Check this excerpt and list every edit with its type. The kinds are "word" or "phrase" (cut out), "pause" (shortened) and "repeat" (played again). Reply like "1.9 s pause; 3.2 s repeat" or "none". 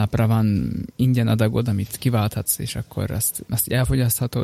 none